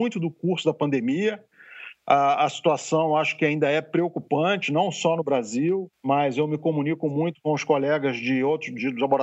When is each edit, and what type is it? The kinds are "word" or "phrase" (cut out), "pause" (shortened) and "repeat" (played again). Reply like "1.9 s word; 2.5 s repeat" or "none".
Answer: 5.9 s pause